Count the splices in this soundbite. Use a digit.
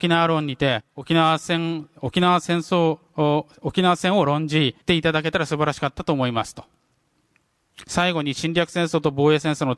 2